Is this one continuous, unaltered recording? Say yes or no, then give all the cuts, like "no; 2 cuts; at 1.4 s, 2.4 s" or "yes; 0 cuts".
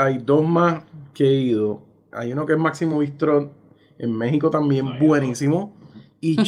yes; 0 cuts